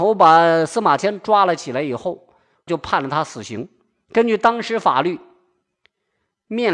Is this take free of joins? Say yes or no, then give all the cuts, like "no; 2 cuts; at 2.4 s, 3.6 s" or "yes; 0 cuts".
no; 1 cut; at 2.7 s